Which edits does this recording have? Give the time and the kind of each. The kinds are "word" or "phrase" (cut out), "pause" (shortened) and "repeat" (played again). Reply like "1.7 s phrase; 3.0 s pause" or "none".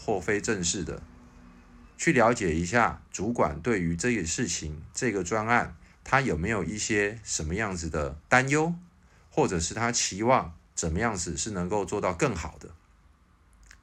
1.9 s pause; 3.1 s pause; 8.2 s pause